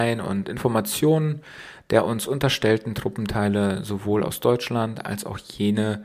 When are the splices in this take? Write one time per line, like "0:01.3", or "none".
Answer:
none